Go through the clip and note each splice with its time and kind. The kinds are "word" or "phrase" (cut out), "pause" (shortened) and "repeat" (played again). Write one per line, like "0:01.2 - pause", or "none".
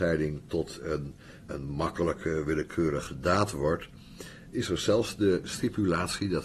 0:01.5 - word
0:04.5 - word